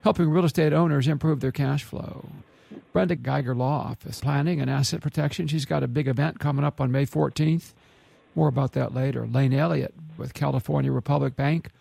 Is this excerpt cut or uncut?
cut